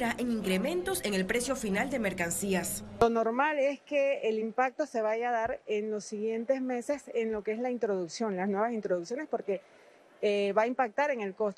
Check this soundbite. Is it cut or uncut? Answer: uncut